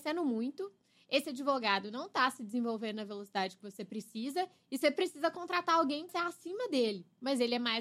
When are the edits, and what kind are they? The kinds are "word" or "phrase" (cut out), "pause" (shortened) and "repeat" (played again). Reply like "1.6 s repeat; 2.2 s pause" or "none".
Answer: 6.1 s word